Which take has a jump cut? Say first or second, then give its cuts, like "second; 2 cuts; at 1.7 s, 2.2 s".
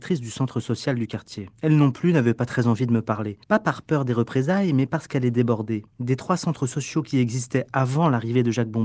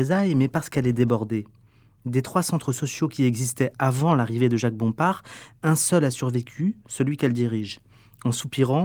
first; 3 cuts; at 1.5 s, 3.4 s, 5.9 s